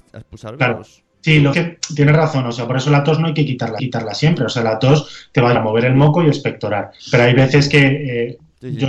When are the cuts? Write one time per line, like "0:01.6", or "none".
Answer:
0:01.1
0:01.5
0:03.8
0:05.6
0:07.0